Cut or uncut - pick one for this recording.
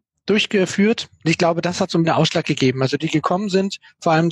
cut